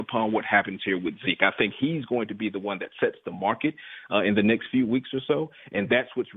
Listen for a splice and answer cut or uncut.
uncut